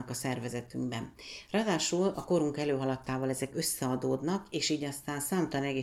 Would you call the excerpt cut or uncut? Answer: uncut